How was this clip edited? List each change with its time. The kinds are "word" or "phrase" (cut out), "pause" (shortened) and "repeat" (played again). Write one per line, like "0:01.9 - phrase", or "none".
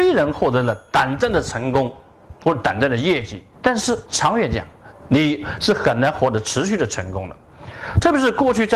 0:03.5 - pause
0:04.1 - pause